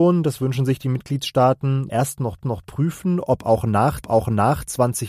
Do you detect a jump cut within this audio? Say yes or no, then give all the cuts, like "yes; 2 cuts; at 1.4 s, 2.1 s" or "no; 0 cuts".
yes; 3 cuts; at 1.9 s, 2.4 s, 4.0 s